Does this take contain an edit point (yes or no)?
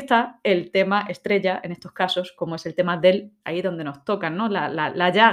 yes